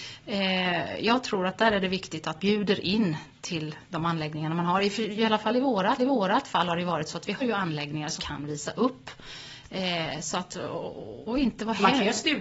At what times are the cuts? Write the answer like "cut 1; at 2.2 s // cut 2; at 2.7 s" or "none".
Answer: cut 1; at 2.4 s // cut 2; at 6.0 s // cut 3; at 7.4 s // cut 4; at 8.2 s // cut 5; at 11.2 s